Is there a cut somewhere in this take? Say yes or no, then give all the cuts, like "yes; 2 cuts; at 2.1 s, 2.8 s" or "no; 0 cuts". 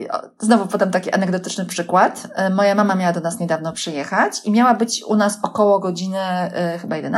no; 0 cuts